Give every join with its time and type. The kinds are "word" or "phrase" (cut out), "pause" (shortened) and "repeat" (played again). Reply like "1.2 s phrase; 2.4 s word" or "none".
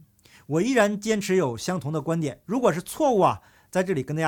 2.4 s pause